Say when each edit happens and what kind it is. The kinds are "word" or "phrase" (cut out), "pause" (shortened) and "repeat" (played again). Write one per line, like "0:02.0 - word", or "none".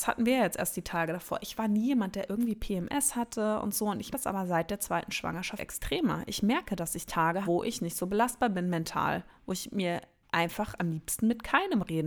0:04.1 - word
0:05.6 - word
0:07.4 - word
0:10.8 - word